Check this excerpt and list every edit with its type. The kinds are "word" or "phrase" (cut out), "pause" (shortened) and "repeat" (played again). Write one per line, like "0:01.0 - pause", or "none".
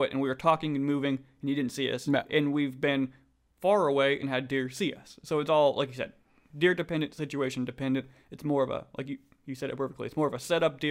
none